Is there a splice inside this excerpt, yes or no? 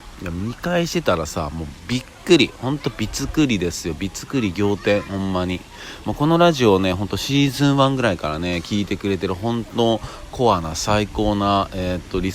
no